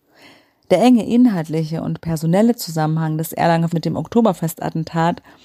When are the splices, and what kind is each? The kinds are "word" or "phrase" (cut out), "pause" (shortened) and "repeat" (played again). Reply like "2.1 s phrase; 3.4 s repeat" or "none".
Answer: 3.7 s word